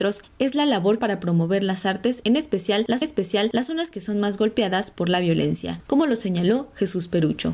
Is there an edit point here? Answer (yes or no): yes